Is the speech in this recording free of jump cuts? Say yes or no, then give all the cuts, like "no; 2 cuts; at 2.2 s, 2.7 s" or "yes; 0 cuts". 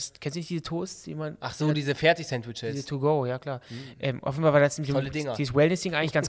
yes; 0 cuts